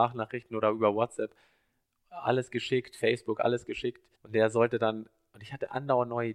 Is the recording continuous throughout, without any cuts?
no; 1 cut; at 4.1 s

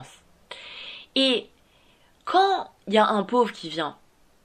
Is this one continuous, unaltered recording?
yes; 0 cuts

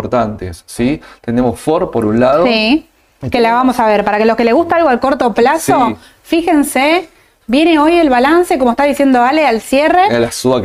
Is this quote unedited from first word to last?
yes; 0 cuts

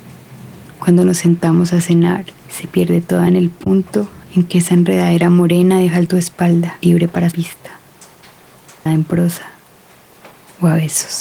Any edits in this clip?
yes; 6 cuts; at 2.4 s, 3.3 s, 6.1 s, 6.8 s, 7.3 s, 8.9 s

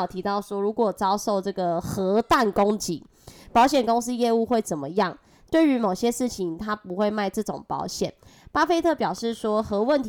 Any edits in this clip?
no; 0 cuts

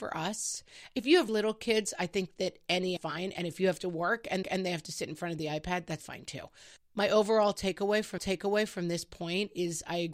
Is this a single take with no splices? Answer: no; 6 cuts; at 1.3 s, 3.0 s, 4.4 s, 6.0 s, 6.8 s, 8.2 s

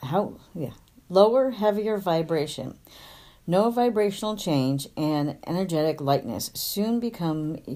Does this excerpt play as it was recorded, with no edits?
yes; 0 cuts

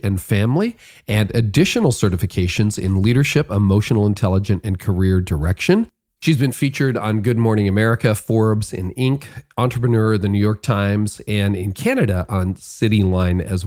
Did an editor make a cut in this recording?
no; 0 cuts

